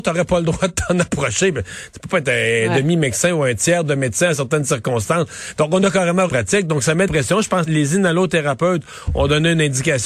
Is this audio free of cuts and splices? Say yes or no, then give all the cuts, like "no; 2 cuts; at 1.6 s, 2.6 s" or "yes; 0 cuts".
no; 3 cuts; at 6.3 s, 7.1 s, 7.7 s